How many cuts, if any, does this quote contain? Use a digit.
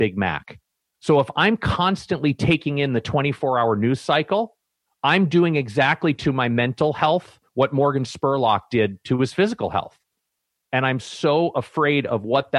0